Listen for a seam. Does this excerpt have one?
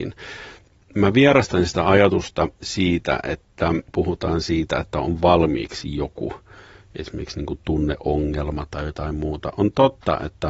no; 0 cuts

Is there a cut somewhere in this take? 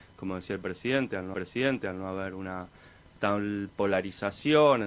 yes; 1 cut; at 1.3 s

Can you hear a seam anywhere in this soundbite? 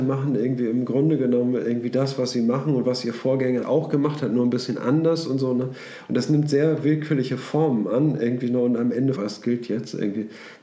yes; 2 cuts; at 3.6 s, 9.2 s

